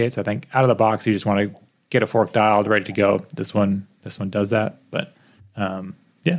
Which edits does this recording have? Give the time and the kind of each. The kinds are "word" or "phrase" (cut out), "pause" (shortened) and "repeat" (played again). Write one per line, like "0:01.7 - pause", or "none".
none